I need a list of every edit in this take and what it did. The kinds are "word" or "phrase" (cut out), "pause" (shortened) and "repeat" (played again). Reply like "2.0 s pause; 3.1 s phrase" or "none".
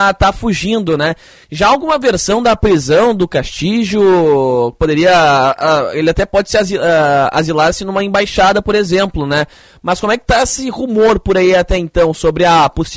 none